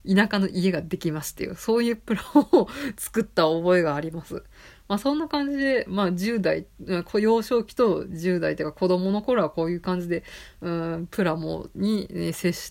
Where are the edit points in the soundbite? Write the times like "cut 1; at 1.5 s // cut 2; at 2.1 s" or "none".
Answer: none